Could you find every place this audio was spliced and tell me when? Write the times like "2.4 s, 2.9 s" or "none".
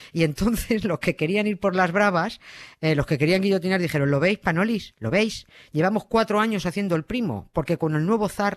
none